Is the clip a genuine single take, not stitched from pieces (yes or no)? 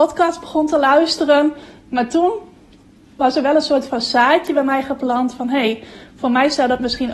yes